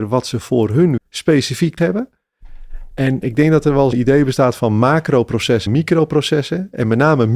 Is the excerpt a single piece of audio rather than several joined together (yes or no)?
no